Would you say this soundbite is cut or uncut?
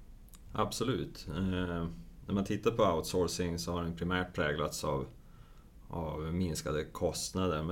uncut